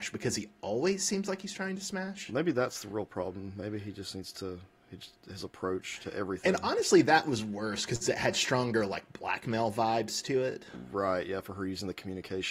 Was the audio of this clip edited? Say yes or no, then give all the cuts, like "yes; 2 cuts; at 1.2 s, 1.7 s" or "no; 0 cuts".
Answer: no; 0 cuts